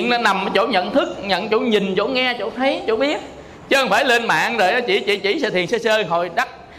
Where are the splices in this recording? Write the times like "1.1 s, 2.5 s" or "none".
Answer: 5.2 s